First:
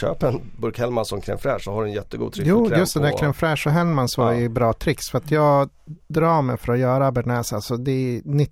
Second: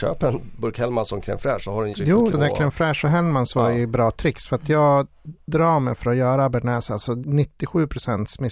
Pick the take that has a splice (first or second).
second